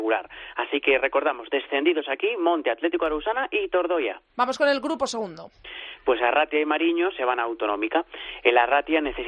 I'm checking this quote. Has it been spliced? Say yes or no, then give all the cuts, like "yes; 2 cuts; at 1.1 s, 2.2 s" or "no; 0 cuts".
yes; 1 cut; at 4.3 s